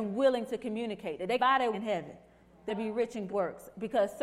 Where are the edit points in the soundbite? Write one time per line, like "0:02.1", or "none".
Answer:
0:01.4
0:01.7
0:02.7
0:03.3